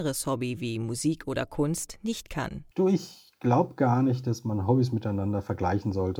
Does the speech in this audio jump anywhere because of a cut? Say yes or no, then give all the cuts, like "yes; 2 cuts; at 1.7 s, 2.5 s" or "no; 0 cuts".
yes; 1 cut; at 2.7 s